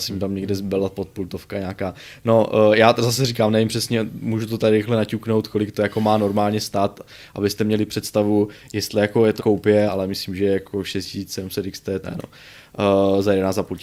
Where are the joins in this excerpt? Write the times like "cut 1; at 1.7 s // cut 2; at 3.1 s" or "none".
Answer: cut 1; at 9.4 s // cut 2; at 9.9 s // cut 3; at 12.0 s